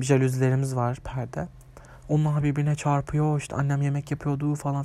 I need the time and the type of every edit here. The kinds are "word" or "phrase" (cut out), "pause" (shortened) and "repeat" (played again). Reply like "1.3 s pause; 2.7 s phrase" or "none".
none